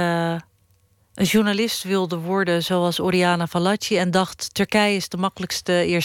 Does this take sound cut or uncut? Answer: uncut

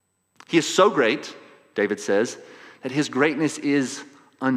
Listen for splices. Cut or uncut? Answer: uncut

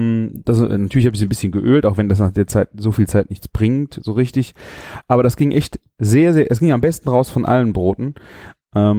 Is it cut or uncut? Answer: uncut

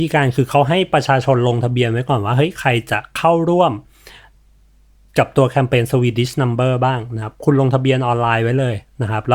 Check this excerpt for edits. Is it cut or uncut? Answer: uncut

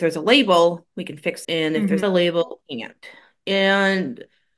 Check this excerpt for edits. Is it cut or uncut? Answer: cut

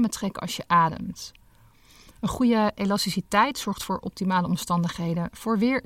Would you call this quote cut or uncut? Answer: uncut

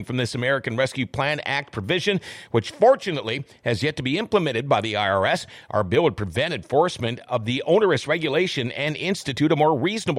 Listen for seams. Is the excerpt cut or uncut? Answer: uncut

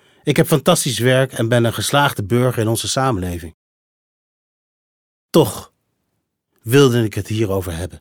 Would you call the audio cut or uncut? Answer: uncut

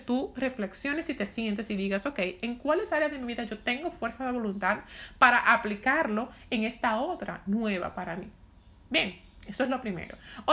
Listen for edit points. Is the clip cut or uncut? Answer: uncut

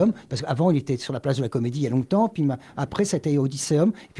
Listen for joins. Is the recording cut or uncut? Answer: uncut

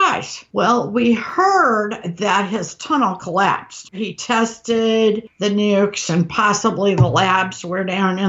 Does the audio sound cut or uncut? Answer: uncut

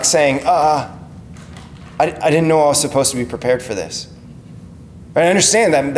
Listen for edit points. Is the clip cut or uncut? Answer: uncut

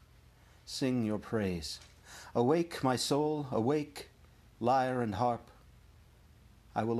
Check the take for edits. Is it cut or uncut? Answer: uncut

